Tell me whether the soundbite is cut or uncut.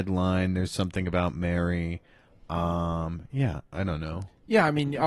uncut